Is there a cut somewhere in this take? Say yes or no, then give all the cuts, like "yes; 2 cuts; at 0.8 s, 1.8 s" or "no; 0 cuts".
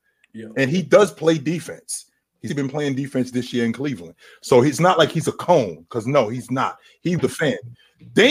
yes; 2 cuts; at 2.5 s, 7.2 s